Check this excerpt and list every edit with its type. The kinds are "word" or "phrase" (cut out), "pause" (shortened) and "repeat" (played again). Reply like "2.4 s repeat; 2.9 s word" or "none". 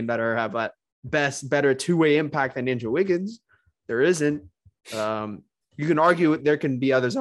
none